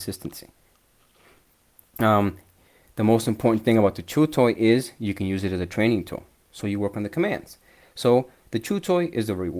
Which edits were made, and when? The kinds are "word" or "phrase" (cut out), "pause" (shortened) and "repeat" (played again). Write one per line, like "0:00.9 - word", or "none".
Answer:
none